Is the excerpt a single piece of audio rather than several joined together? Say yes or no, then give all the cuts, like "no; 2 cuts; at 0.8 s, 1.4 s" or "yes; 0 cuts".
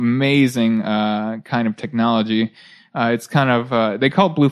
yes; 0 cuts